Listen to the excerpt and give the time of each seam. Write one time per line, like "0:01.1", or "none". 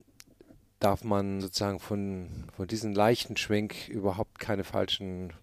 0:01.4